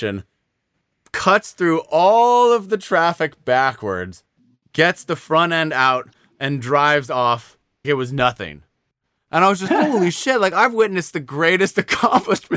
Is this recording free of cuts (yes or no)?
no